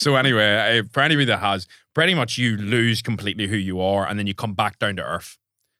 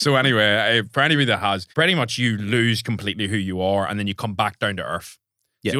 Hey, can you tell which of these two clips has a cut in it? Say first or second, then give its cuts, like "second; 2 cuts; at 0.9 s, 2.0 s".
second; 1 cut; at 1.7 s